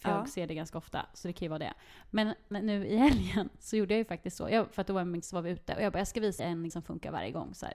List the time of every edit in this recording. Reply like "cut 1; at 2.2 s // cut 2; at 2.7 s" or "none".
cut 1; at 2.5 s // cut 2; at 5.2 s // cut 3; at 6.4 s // cut 4; at 6.7 s